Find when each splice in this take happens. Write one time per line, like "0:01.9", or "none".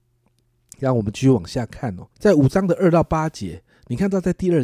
0:02.1